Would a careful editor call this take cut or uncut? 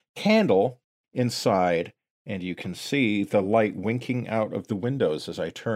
uncut